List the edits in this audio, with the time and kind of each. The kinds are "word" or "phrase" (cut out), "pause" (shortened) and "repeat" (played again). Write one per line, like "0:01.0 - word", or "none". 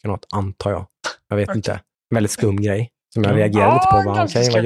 0:01.9 - pause